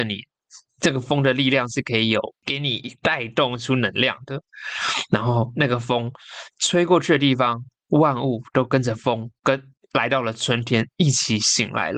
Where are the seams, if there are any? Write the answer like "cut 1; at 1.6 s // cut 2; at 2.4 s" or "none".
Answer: cut 1; at 2.4 s